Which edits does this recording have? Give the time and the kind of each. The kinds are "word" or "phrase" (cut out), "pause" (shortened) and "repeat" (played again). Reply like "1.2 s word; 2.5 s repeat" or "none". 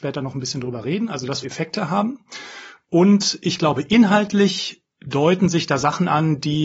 1.4 s phrase; 4.9 s pause